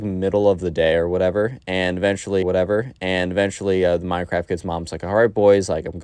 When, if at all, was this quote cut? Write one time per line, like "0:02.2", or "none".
0:02.4